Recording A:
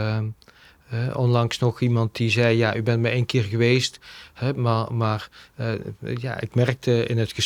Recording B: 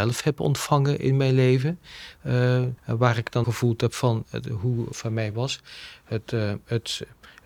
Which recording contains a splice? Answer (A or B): B